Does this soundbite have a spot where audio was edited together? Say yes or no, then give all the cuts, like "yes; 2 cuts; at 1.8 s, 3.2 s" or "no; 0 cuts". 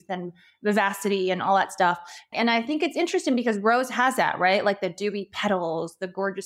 no; 0 cuts